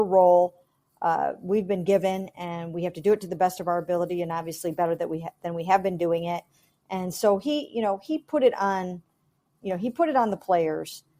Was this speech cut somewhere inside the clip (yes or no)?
no